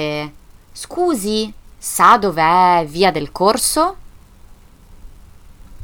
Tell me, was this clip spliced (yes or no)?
no